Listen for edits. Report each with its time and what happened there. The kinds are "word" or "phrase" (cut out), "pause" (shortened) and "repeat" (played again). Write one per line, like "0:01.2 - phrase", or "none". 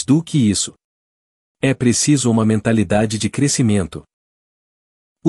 none